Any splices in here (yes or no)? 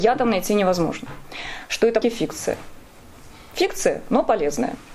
yes